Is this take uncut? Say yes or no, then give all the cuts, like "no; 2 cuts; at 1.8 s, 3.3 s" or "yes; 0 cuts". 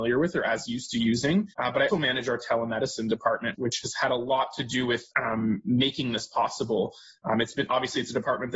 no; 4 cuts; at 1.5 s, 1.9 s, 3.5 s, 5.1 s